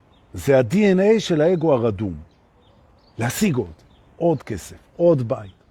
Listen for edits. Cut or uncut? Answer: uncut